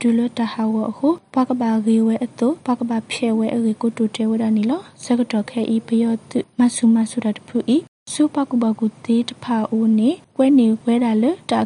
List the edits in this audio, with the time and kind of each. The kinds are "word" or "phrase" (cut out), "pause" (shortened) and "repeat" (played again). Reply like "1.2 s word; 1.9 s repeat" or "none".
2.6 s pause